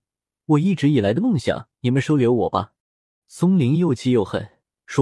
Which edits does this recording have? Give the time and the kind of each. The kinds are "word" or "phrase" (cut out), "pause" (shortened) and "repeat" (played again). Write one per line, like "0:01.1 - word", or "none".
0:01.7 - pause
0:02.8 - pause